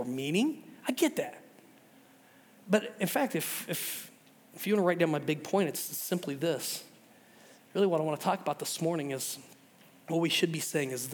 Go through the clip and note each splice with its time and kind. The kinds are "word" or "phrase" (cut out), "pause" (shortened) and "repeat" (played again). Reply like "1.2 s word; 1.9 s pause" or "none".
none